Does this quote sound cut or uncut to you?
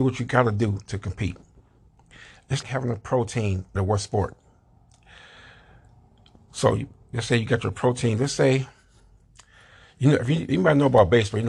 cut